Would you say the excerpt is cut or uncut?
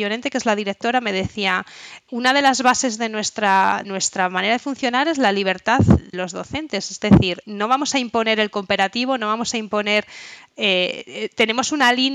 cut